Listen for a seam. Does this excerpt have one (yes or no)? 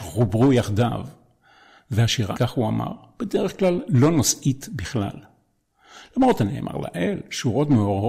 yes